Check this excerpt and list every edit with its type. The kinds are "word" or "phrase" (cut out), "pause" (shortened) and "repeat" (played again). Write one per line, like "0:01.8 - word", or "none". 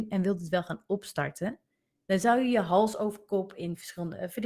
none